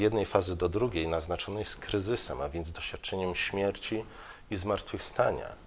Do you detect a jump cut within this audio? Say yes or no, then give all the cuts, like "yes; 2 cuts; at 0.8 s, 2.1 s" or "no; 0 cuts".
no; 0 cuts